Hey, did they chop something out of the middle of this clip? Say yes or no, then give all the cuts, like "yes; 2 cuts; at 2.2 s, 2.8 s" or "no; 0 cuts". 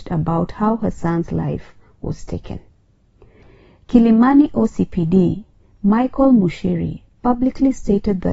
no; 0 cuts